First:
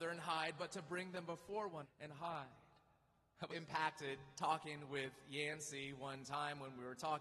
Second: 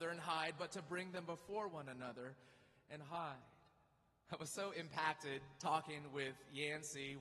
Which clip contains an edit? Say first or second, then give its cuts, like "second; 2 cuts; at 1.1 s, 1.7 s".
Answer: first; 2 cuts; at 1.8 s, 3.5 s